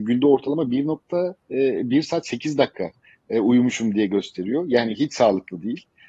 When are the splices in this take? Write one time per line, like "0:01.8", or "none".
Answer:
none

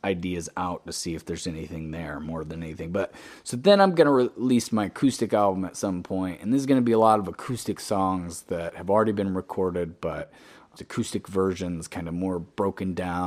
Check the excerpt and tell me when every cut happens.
0:10.8

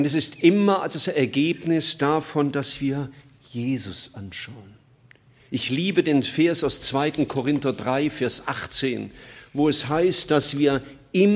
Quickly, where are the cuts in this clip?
none

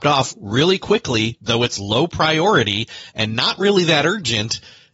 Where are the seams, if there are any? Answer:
none

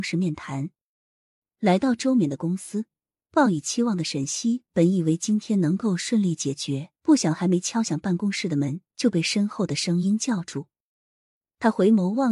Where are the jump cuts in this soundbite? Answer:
0:07.0

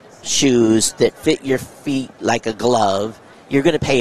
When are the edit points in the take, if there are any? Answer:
none

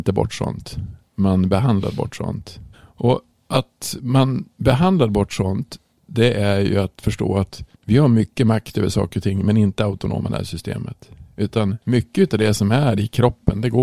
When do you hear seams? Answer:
0:02.7
0:07.7

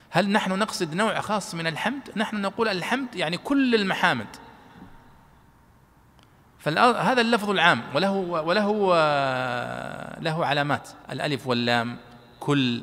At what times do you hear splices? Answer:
0:11.0

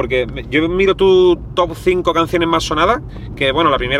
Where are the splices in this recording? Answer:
none

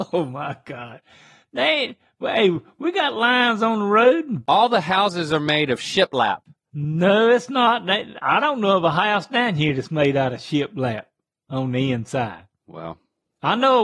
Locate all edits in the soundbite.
none

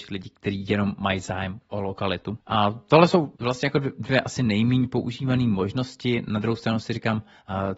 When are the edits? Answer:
0:02.4
0:03.4

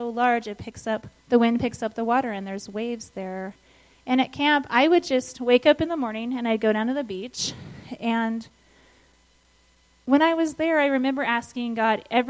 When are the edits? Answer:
0:01.2

